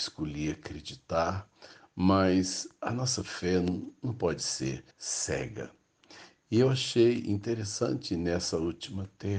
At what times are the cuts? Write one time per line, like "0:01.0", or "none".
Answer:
0:04.9